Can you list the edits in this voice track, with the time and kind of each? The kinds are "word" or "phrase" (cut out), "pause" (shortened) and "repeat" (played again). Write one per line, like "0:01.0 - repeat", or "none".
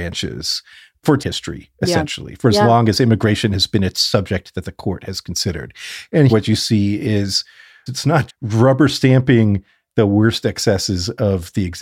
0:01.2 - word
0:06.3 - word
0:07.9 - phrase
0:08.3 - word